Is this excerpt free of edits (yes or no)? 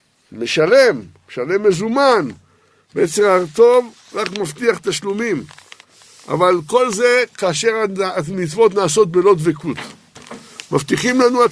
yes